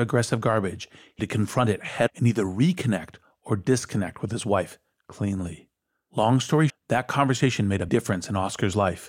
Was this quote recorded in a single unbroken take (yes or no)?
no